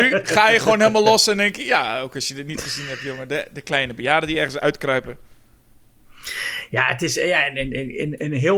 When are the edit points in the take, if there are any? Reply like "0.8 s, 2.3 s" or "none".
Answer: none